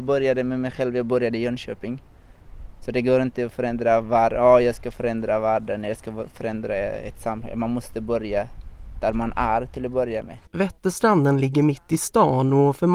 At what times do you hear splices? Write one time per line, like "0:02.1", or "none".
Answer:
0:10.5